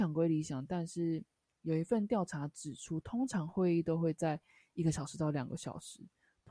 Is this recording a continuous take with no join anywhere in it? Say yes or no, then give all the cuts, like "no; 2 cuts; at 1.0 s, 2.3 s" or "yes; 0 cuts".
yes; 0 cuts